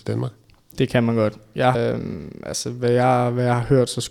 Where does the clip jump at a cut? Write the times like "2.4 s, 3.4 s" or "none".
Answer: 1.7 s